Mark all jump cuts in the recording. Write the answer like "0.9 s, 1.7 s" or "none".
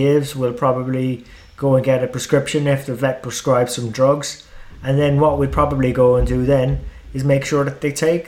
none